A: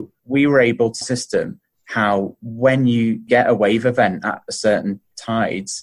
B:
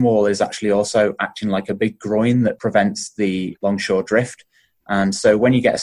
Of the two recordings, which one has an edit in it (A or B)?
A